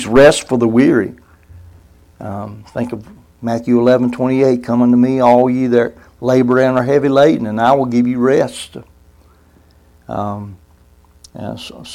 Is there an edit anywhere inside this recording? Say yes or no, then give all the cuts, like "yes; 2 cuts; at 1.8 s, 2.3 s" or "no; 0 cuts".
no; 0 cuts